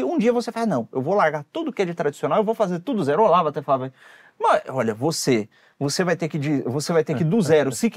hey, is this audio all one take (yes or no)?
yes